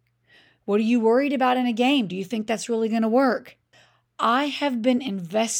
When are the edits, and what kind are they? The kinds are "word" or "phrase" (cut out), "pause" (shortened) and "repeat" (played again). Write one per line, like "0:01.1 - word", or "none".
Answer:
0:03.7 - pause